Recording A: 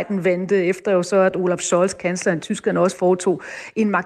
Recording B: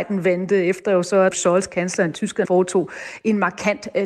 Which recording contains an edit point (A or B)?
B